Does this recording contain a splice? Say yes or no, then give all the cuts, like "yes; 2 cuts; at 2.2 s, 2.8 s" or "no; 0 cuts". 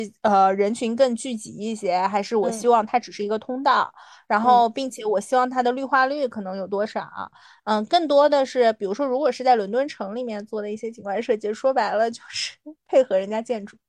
no; 0 cuts